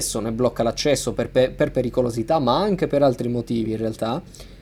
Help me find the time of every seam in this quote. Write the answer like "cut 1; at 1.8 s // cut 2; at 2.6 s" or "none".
none